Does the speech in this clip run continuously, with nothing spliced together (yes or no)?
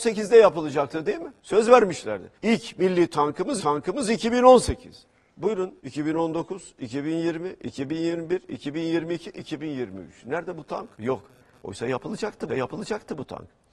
no